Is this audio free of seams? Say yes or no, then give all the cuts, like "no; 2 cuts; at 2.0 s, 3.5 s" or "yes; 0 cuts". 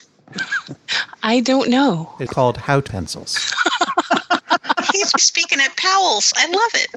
no; 3 cuts; at 2.3 s, 2.9 s, 5.2 s